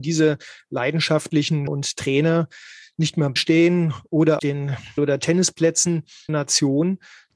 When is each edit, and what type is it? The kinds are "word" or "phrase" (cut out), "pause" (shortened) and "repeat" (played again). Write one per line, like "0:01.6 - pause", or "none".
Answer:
0:01.7 - word
0:03.4 - word
0:04.4 - word
0:05.0 - word
0:06.3 - word